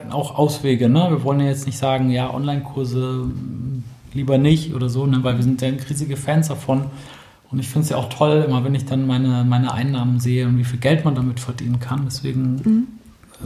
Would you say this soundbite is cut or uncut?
uncut